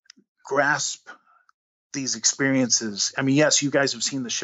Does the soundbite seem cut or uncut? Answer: uncut